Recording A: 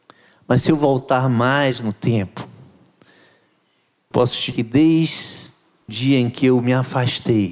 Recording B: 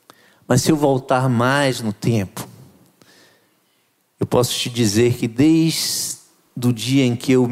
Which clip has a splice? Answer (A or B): A